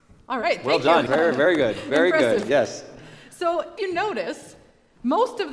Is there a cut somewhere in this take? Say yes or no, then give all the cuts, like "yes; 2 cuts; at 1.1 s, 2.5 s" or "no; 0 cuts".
yes; 2 cuts; at 1.1 s, 3.8 s